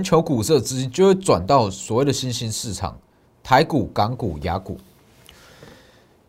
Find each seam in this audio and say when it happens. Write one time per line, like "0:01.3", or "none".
none